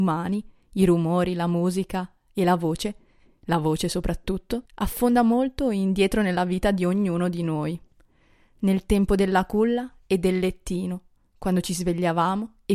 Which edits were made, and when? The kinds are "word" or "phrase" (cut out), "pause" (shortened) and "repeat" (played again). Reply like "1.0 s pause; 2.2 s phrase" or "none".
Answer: 4.7 s pause

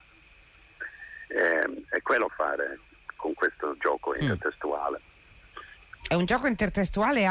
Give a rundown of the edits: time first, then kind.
2.3 s phrase; 6.0 s pause

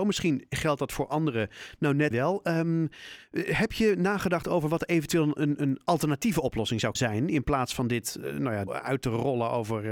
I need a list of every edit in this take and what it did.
2.1 s word; 5.4 s word; 6.9 s word; 8.7 s word

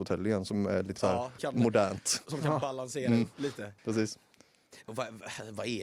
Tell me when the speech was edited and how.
1.0 s word; 1.4 s word; 3.8 s pause; 4.9 s word

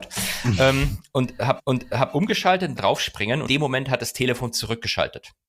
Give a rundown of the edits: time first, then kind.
1.6 s repeat; 2.8 s word; 3.5 s word

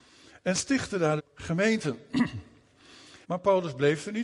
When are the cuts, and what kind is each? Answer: 1.2 s phrase; 3.2 s pause

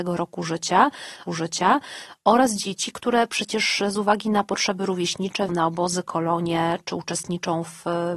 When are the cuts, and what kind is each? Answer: 1.3 s repeat; 5.5 s word

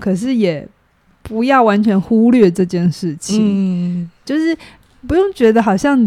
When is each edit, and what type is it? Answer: 4.2 s word

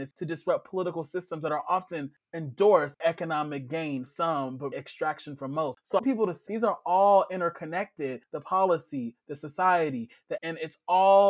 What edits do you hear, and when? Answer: 3.0 s word; 4.1 s word; 4.7 s word; 6.0 s word; 6.5 s word; 10.4 s word

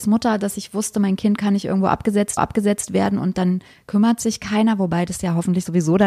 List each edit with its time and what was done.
2.4 s repeat

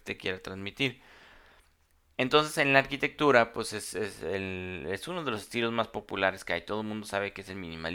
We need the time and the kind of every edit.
none

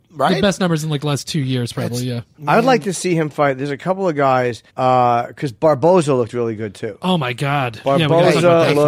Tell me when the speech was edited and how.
4.7 s pause

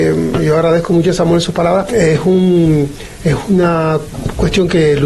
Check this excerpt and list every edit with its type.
1.9 s word

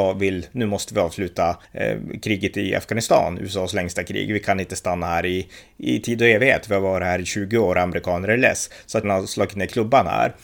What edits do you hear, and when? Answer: 1.6 s pause; 9.0 s phrase

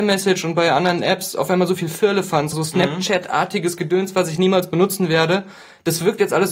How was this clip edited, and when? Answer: 2.5 s word

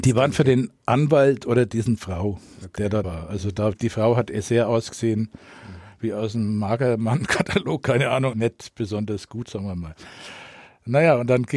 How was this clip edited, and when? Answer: 3.0 s word; 3.7 s word; 8.3 s word

